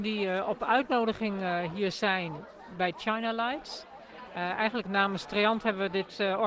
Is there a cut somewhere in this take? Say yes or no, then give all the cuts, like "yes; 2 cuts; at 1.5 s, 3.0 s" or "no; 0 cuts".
no; 0 cuts